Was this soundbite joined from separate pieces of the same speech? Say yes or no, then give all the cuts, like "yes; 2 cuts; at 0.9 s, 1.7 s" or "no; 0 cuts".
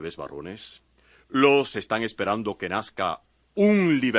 yes; 1 cut; at 1.7 s